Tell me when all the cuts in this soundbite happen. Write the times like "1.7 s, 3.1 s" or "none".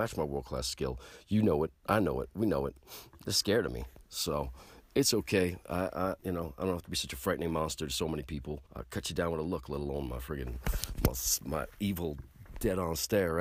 6.2 s, 8.7 s